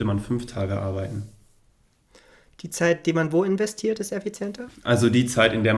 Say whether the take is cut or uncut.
uncut